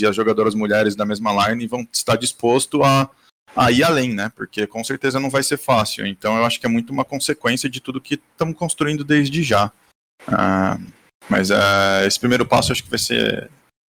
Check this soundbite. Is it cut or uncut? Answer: uncut